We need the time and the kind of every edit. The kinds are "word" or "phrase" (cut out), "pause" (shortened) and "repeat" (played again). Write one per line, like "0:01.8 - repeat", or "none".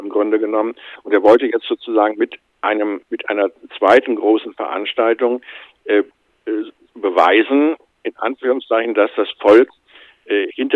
none